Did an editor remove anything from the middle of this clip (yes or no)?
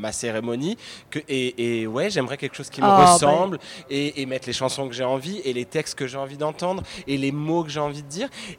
no